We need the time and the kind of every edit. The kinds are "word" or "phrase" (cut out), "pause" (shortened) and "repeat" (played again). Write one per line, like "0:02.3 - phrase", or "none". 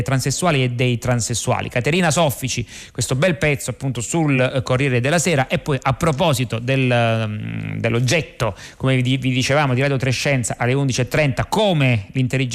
none